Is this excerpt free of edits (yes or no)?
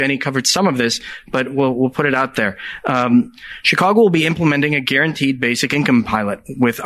yes